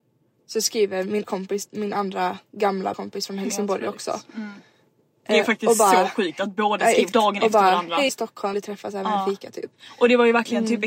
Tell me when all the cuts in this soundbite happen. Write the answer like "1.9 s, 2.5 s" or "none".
1.3 s, 2.9 s, 7.1 s, 8.1 s, 8.5 s